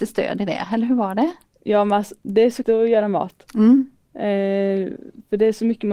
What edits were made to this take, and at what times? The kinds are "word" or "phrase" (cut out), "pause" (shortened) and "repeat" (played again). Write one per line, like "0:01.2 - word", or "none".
0:02.6 - word